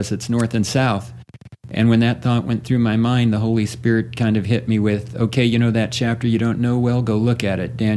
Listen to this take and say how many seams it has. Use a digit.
0